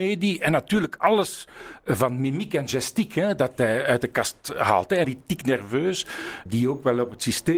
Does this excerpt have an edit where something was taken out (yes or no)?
yes